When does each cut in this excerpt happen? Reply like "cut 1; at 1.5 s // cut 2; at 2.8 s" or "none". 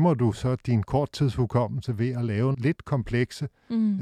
cut 1; at 2.5 s